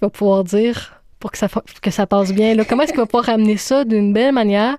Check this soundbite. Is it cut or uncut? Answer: uncut